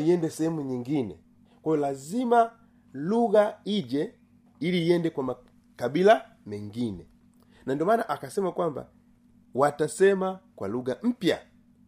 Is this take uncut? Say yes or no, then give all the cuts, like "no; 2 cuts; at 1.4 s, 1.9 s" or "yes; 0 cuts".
yes; 0 cuts